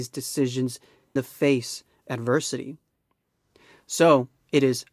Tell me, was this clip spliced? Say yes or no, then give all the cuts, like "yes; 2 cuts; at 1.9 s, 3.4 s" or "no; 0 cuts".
yes; 2 cuts; at 1.2 s, 2.0 s